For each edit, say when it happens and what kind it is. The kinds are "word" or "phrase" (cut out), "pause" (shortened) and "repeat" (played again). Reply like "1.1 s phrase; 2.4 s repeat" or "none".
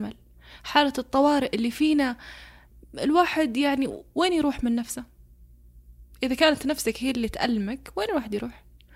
none